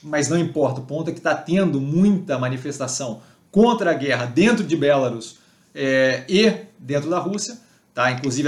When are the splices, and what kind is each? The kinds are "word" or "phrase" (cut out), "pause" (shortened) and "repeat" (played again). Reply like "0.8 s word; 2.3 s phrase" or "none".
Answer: none